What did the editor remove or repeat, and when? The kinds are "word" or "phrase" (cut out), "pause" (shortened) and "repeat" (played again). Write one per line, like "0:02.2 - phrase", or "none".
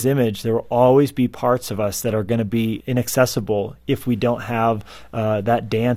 0:02.8 - word